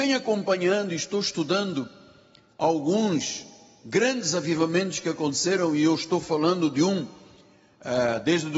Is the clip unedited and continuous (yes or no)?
yes